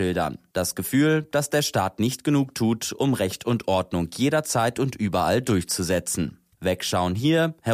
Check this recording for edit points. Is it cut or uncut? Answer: uncut